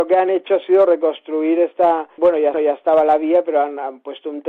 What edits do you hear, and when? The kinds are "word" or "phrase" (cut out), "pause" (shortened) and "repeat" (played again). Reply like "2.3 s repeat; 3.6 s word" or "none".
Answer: 2.2 s word; 2.5 s repeat